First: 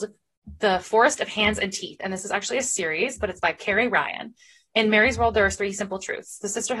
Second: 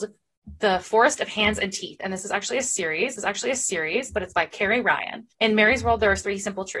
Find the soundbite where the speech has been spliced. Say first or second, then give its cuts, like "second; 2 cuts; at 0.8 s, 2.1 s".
second; 2 cuts; at 3.2 s, 5.3 s